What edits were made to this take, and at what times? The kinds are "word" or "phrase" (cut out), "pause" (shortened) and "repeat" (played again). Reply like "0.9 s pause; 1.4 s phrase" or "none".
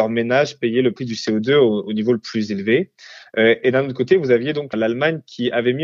none